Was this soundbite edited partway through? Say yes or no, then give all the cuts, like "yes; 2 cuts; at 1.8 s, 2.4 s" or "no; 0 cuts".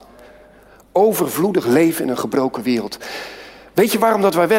no; 0 cuts